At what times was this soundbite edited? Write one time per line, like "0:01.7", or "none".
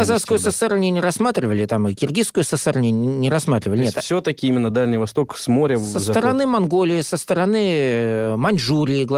none